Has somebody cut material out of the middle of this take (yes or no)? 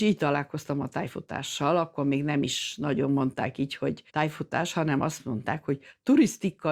yes